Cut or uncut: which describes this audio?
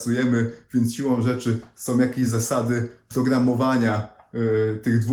uncut